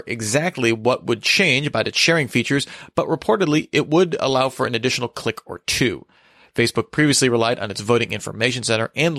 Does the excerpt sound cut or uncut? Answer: uncut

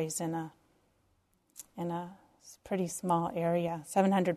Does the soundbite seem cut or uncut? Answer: uncut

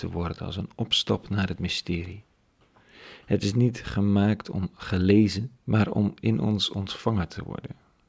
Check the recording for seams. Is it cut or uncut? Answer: cut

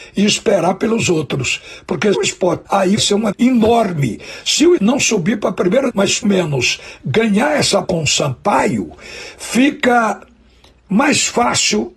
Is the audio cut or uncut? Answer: cut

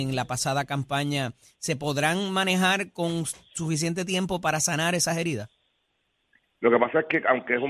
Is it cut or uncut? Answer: uncut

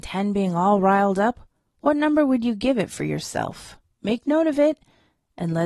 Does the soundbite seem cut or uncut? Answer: uncut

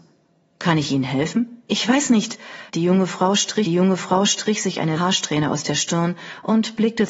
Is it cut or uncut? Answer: cut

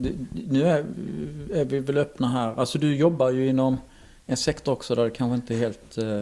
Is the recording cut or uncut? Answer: uncut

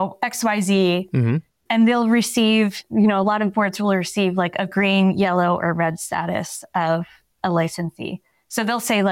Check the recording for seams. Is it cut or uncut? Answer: uncut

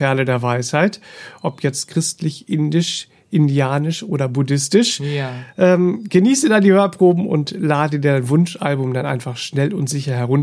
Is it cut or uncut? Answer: uncut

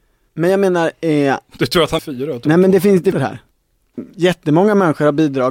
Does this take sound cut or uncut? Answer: cut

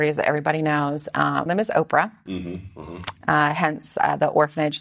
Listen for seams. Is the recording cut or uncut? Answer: cut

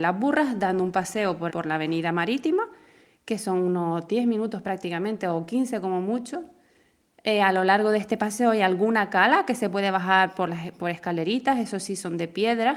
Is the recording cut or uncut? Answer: cut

